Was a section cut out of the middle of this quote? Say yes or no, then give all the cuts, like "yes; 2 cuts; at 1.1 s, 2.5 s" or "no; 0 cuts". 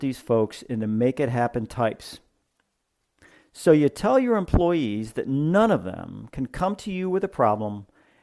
no; 0 cuts